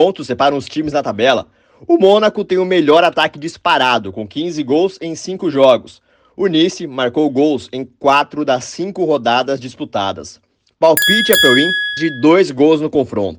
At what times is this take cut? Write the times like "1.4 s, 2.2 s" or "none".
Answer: 12.0 s